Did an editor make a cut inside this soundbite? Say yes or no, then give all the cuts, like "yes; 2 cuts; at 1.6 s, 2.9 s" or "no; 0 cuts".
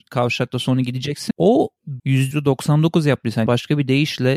yes; 4 cuts; at 1.3 s, 2.0 s, 2.3 s, 3.5 s